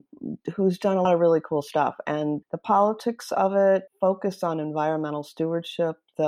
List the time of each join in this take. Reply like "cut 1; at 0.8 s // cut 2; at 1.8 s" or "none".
cut 1; at 1.0 s // cut 2; at 2.4 s // cut 3; at 3.9 s